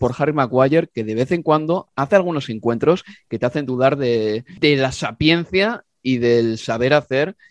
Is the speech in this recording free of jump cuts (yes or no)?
yes